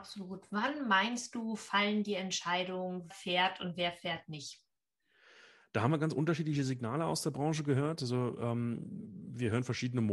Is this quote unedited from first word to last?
no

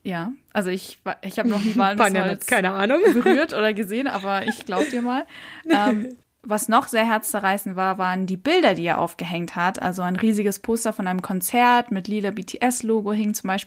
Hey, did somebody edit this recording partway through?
no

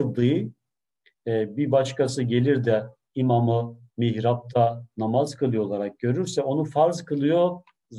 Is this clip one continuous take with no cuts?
yes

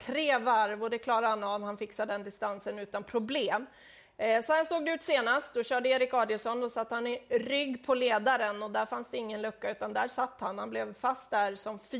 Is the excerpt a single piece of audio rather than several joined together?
yes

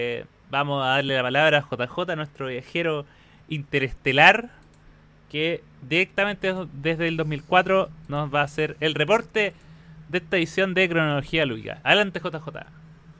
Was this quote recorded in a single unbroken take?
yes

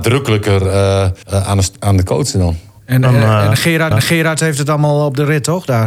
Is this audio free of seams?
no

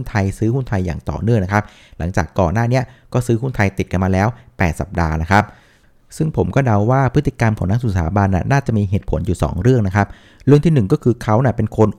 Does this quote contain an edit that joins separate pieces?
no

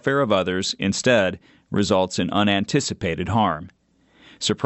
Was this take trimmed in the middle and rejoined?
no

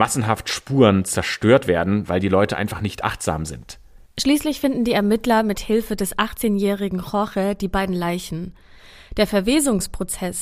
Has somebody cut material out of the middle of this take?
no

